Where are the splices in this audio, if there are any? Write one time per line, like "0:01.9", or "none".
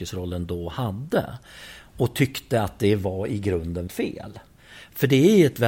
0:03.9